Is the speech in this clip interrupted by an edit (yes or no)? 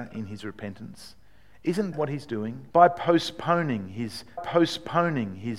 yes